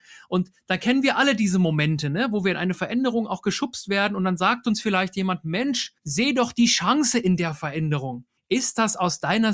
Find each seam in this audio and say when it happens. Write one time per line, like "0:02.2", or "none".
0:06.0
0:08.4